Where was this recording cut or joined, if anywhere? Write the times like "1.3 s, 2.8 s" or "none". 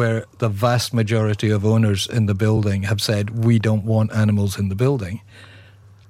none